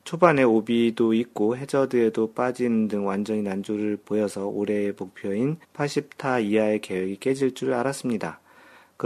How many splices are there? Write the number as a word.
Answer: two